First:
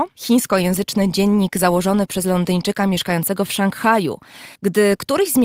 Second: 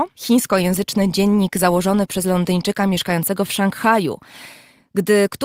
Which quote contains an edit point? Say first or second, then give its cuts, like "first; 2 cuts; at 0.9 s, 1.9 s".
first; 1 cut; at 4.6 s